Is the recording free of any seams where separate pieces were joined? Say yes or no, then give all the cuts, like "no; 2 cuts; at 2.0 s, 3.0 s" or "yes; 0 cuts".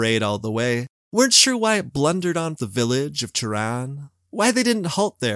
no; 1 cut; at 2.6 s